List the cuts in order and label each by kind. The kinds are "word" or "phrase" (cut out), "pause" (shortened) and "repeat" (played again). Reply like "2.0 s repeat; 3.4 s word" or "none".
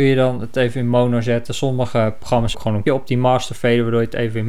2.5 s word; 2.9 s word